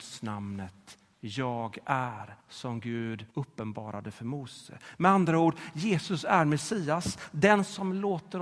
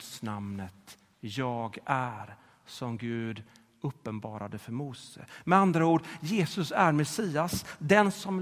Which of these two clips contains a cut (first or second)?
first